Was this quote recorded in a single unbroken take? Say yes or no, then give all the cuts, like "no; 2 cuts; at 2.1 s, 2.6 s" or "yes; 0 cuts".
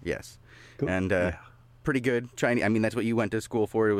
yes; 0 cuts